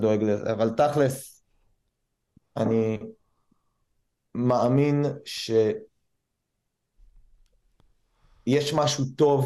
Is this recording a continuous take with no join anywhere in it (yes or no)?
yes